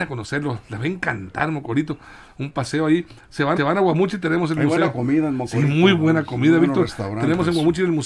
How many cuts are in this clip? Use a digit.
1